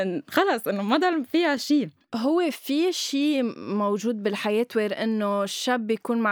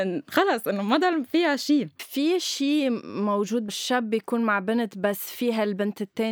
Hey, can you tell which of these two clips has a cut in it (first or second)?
second